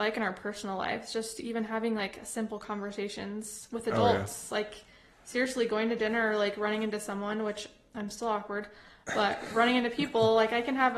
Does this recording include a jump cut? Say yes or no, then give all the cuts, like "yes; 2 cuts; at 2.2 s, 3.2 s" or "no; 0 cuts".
no; 0 cuts